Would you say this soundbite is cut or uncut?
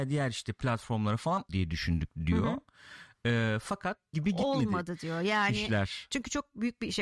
cut